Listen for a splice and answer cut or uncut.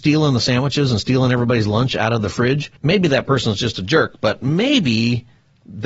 cut